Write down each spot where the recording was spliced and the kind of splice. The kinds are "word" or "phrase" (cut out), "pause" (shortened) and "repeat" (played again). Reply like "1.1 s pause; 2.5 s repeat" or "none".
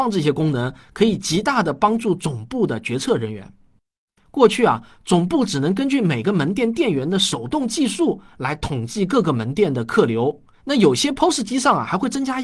10.5 s pause